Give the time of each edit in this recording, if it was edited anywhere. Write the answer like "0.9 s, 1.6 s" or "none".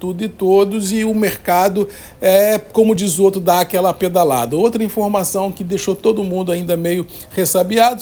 none